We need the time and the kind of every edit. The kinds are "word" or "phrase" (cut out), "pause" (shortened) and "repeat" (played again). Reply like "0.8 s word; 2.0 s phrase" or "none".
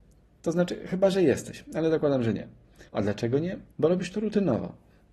2.9 s pause; 3.7 s pause